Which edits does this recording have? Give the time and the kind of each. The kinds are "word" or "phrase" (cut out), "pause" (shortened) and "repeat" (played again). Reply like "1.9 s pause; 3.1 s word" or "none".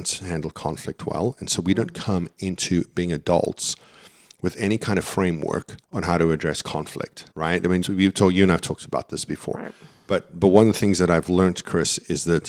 5.8 s pause; 7.3 s pause; 7.8 s word